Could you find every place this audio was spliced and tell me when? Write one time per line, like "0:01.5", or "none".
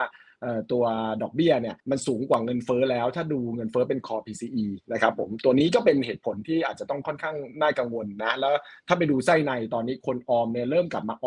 0:01.8